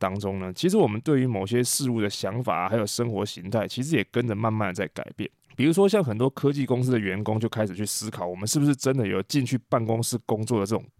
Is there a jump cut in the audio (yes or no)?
yes